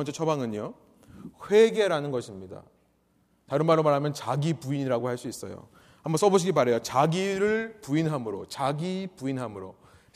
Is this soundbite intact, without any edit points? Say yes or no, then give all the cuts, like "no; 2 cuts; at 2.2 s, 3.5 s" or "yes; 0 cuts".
yes; 0 cuts